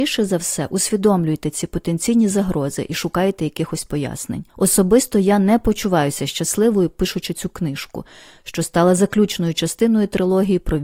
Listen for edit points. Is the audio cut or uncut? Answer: uncut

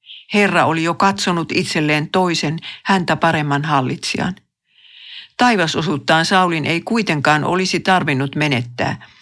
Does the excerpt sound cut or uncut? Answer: uncut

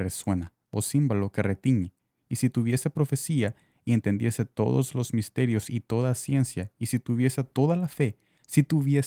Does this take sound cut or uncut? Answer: uncut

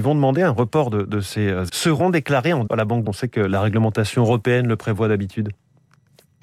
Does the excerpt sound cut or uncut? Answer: cut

